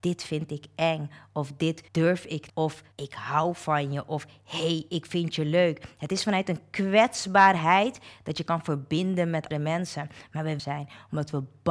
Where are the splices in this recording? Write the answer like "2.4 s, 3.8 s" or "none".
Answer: 1.9 s, 2.5 s, 2.9 s, 9.5 s, 10.6 s